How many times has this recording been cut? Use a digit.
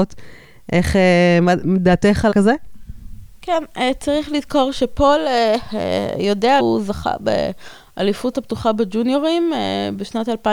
3